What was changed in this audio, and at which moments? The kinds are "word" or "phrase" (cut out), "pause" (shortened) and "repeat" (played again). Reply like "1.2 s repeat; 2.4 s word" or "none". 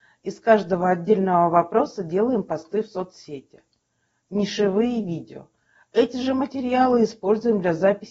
none